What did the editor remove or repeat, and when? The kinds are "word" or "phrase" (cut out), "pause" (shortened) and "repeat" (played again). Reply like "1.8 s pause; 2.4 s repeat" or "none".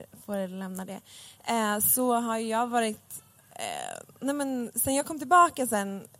none